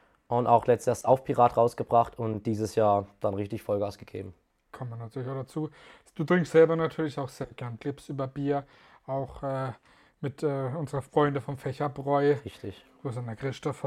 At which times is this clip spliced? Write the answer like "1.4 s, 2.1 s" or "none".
7.8 s